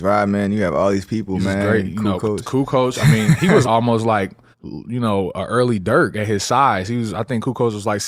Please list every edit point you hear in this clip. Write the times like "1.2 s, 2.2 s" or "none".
3.6 s, 4.5 s